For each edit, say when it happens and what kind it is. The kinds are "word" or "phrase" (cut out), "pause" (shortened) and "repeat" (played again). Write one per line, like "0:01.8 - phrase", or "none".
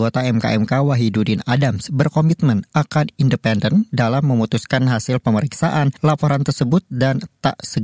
none